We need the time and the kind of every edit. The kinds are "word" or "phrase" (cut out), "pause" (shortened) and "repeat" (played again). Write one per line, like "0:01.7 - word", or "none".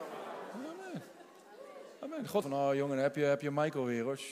0:02.4 - phrase